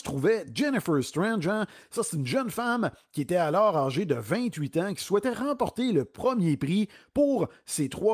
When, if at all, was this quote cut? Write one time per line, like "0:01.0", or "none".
none